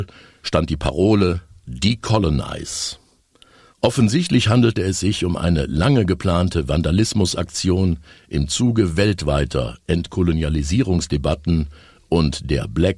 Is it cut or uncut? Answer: uncut